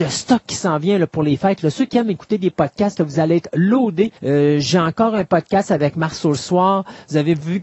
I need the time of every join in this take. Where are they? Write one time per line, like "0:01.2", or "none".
0:04.2